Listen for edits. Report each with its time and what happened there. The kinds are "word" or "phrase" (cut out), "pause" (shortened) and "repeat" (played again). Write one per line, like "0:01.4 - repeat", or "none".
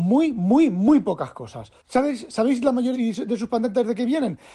0:01.8 - pause
0:02.9 - phrase